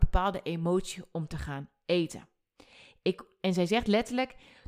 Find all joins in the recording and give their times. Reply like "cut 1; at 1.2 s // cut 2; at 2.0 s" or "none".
none

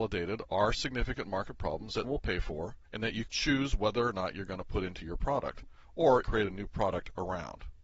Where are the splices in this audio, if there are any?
cut 1; at 2.0 s // cut 2; at 2.8 s // cut 3; at 3.3 s // cut 4; at 6.2 s

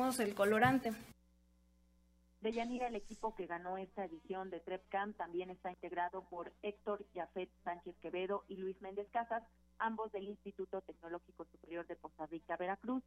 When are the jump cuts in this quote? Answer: none

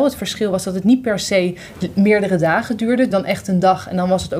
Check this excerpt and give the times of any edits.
cut 1; at 3.1 s

